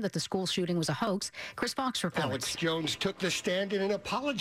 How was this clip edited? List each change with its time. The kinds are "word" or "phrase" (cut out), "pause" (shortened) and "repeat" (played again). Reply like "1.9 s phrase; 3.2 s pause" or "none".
none